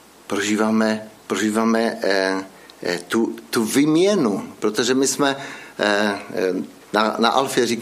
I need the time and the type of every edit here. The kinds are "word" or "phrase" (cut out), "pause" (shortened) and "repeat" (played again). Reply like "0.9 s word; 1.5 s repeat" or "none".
1.2 s pause; 6.8 s pause